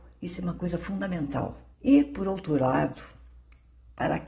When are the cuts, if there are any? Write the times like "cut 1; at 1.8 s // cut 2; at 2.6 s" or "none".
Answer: cut 1; at 1.7 s